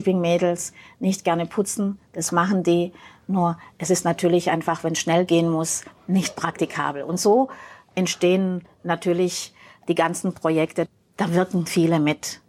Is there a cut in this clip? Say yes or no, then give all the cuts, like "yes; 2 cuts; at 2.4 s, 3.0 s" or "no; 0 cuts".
no; 0 cuts